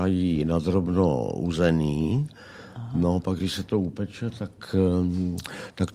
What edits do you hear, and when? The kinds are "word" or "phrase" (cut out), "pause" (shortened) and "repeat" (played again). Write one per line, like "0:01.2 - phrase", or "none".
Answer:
none